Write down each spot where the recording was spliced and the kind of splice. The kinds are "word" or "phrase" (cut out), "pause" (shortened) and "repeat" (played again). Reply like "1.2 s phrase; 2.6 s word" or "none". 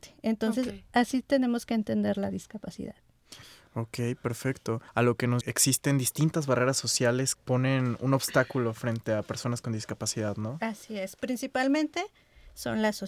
4.9 s pause; 5.4 s phrase; 7.3 s word